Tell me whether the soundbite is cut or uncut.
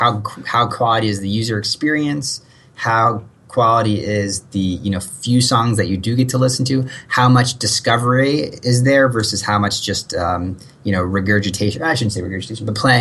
uncut